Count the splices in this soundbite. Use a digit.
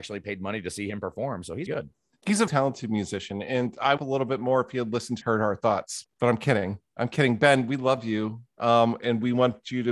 4